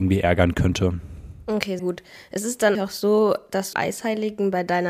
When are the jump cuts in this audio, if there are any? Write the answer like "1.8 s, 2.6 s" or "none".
1.8 s, 2.7 s, 3.7 s

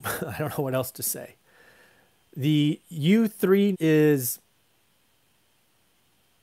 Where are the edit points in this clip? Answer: 3.7 s

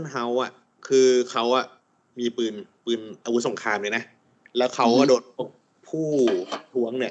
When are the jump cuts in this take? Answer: none

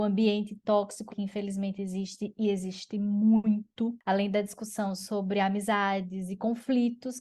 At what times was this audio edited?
1.1 s

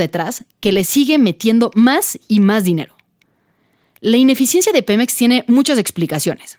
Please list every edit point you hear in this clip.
none

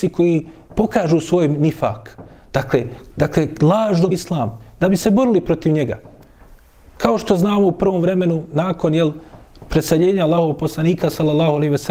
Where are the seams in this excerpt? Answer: 3.1 s, 4.1 s

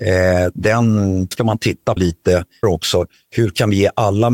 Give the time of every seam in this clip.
1.3 s, 2.0 s, 2.6 s

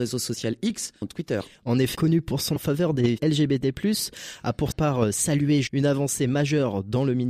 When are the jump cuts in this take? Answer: 1.0 s, 1.9 s, 2.6 s, 3.2 s, 4.7 s, 5.7 s

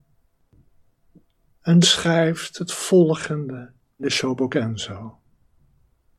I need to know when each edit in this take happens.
1.8 s, 4.0 s

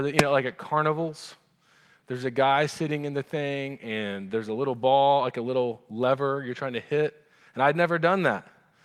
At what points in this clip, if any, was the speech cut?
none

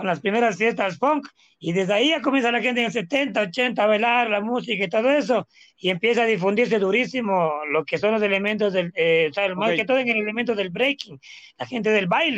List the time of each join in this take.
none

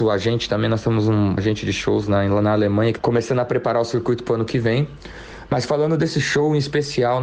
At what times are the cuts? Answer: 1.4 s, 3.0 s

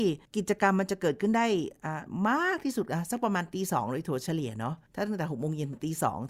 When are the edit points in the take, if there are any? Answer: none

